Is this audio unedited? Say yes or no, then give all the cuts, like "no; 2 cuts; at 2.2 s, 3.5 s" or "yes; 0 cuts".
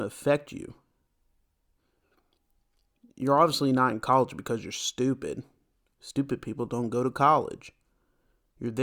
yes; 0 cuts